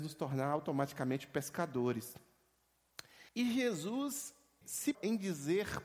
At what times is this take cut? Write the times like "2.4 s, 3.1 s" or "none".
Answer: 3.3 s, 4.6 s, 4.9 s